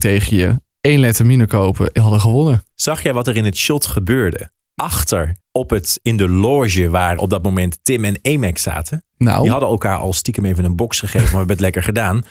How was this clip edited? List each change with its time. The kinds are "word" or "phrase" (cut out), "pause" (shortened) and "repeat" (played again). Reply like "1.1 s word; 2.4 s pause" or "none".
2.0 s word; 2.7 s pause; 5.4 s pause; 7.2 s word

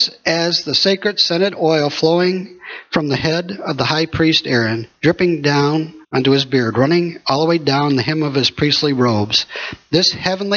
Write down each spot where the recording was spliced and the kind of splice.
6.0 s pause

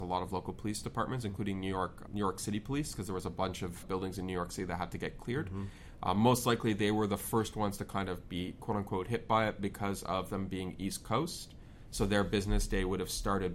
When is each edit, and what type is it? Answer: 2.1 s word; 3.8 s word

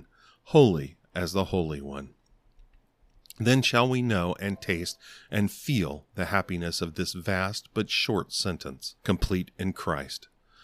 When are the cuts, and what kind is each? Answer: 9.0 s pause

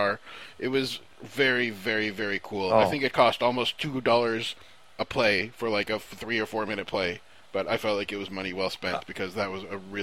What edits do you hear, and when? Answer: none

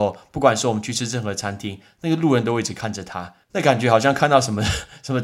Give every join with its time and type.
3.4 s pause

